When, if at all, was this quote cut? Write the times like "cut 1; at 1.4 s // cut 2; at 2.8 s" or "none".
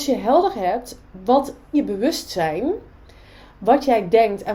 cut 1; at 1.7 s